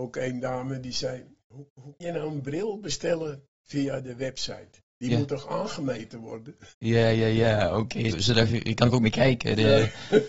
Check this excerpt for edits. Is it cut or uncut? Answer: cut